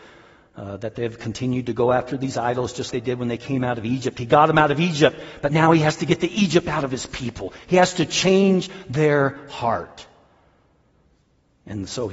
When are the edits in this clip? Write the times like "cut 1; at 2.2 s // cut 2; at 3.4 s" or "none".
cut 1; at 2.9 s